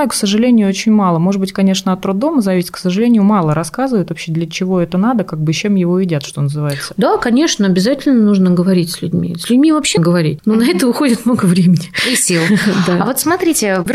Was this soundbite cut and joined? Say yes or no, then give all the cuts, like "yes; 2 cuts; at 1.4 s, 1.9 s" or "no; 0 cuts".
yes; 1 cut; at 10.0 s